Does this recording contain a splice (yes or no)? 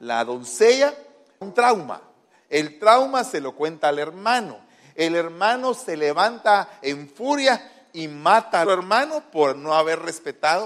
yes